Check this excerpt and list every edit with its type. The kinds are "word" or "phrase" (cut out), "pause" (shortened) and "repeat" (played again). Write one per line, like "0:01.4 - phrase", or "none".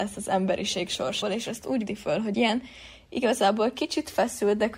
0:01.2 - word
0:01.9 - word
0:02.3 - word